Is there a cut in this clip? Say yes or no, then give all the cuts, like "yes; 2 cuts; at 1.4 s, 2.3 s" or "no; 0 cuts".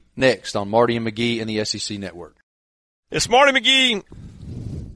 no; 0 cuts